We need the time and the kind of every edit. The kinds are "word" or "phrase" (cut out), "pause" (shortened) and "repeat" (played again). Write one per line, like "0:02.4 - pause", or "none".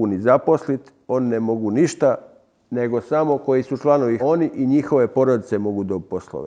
0:04.2 - word